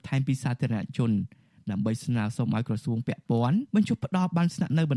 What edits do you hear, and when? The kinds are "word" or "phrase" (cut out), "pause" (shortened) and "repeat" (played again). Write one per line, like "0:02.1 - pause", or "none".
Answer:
0:03.7 - pause